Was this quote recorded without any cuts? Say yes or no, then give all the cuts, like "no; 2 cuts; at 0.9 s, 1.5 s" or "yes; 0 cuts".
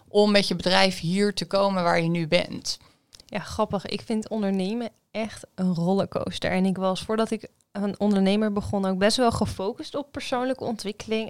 yes; 0 cuts